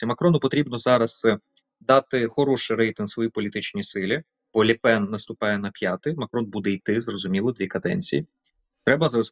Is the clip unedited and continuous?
yes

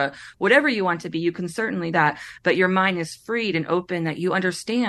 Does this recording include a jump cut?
yes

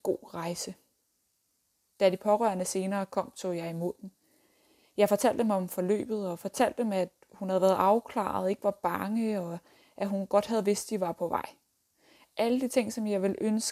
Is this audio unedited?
yes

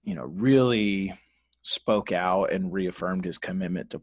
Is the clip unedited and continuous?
yes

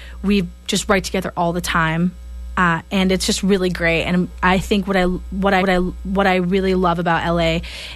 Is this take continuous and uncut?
no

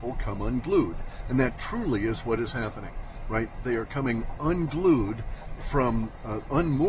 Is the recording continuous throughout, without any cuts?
yes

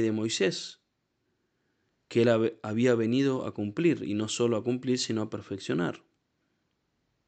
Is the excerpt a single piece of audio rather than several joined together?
yes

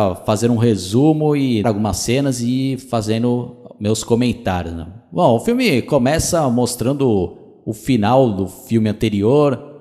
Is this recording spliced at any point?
yes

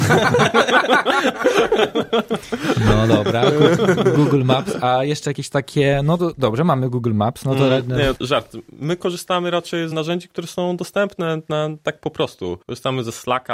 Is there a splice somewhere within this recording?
yes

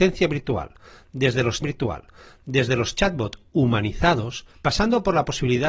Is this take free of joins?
no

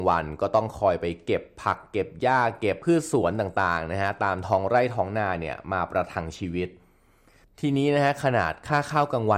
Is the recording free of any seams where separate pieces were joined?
yes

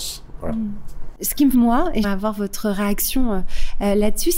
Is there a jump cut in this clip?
yes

